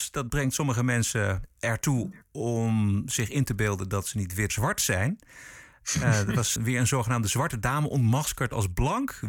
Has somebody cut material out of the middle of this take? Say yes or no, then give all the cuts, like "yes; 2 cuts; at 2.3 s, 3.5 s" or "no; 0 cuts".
yes; 2 cuts; at 4.5 s, 6.6 s